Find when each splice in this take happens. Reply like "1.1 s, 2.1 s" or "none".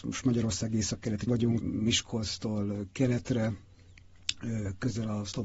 1.3 s, 1.6 s